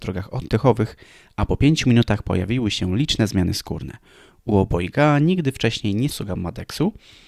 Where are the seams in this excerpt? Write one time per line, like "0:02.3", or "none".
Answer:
0:06.1